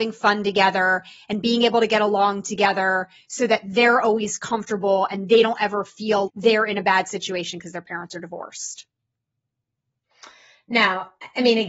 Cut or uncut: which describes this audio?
cut